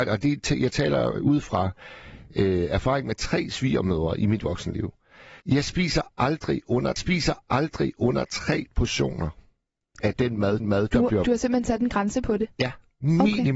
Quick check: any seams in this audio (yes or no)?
yes